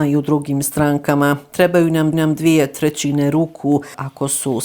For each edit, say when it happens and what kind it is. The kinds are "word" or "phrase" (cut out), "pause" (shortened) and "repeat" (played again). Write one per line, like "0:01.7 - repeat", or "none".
0:02.1 - repeat